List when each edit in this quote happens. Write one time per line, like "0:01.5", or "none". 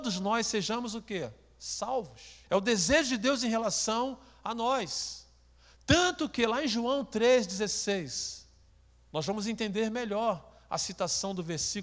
0:02.4
0:08.7